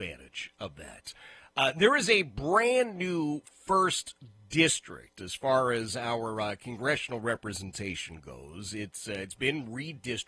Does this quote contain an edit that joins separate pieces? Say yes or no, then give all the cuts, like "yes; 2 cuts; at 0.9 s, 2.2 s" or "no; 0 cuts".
no; 0 cuts